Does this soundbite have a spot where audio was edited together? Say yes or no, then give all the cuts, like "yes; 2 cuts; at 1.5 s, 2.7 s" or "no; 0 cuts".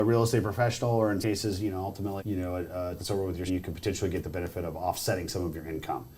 yes; 4 cuts; at 1.2 s, 2.2 s, 3.0 s, 3.5 s